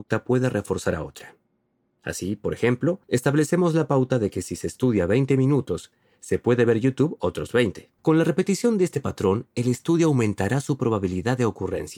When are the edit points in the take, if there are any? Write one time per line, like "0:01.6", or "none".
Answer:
0:03.0
0:08.0